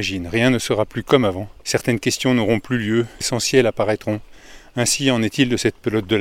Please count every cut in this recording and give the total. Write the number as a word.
one